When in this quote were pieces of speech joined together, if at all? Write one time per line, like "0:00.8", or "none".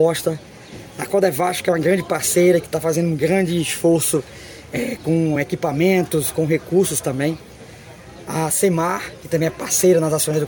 none